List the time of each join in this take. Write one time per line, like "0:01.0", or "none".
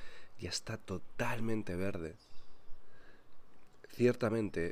none